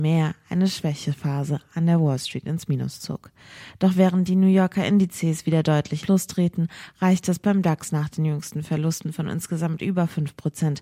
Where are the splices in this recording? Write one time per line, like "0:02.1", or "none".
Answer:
0:06.0